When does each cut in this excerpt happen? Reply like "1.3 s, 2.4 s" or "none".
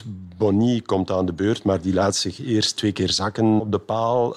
none